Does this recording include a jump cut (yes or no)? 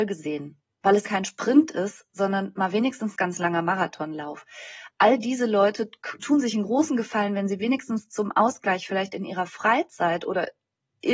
yes